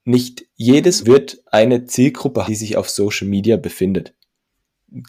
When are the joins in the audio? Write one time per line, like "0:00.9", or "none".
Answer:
0:01.0
0:02.5